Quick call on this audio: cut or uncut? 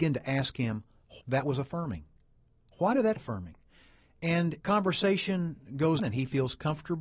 cut